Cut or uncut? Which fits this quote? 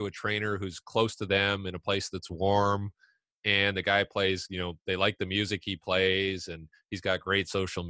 uncut